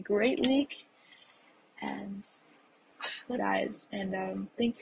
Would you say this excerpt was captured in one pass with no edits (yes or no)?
no